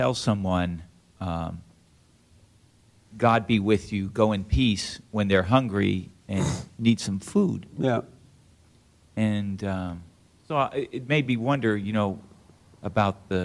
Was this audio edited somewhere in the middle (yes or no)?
no